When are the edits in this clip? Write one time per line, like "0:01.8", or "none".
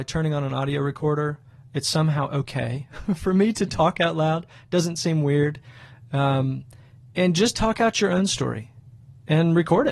none

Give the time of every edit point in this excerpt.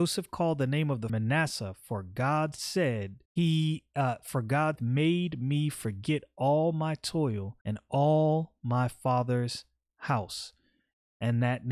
0:01.1
0:03.3
0:04.8
0:07.6

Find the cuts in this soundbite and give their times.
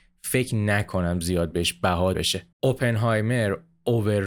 0:02.1
0:02.5

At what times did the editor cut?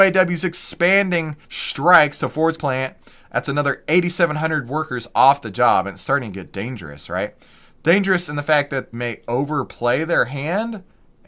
0:01.4
0:02.6
0:08.9

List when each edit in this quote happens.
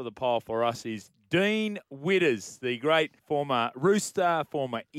0:03.2

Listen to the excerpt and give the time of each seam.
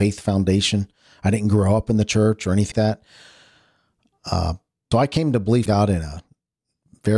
0:02.7
0:04.9
0:05.7

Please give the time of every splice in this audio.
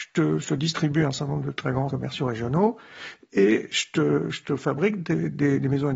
0:01.9

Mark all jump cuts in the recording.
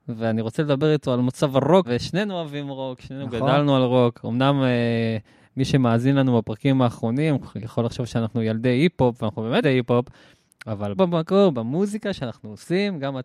0:01.8
0:09.6
0:11.0

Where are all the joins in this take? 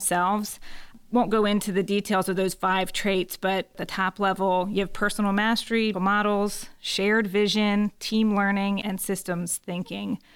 0:05.9

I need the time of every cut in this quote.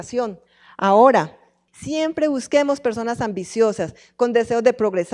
none

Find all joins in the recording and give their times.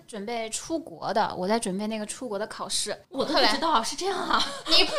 0:03.0

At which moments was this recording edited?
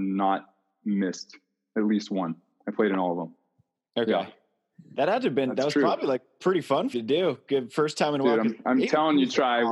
0:06.9

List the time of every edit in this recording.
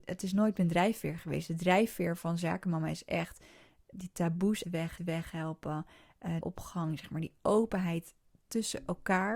0:03.9
0:04.6
0:05.0
0:06.4

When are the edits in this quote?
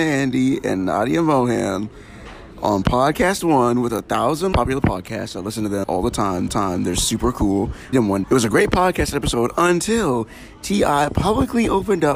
0:04.5
0:05.8
0:06.5
0:07.9
0:08.2

